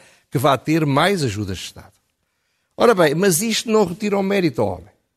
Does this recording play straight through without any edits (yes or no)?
yes